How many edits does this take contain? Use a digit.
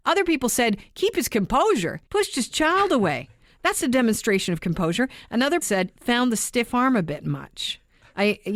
3